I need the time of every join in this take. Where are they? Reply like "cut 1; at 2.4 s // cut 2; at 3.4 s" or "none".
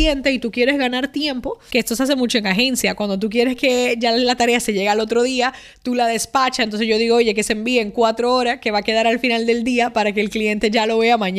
none